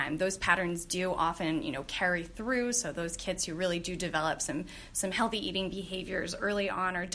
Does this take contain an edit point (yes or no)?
no